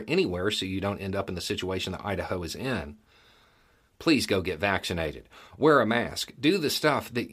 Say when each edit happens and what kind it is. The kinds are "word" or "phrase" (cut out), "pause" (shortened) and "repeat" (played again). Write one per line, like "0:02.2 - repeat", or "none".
none